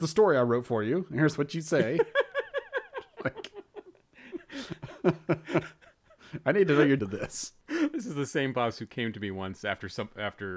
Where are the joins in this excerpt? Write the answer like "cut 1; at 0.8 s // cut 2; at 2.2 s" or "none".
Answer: cut 1; at 7.0 s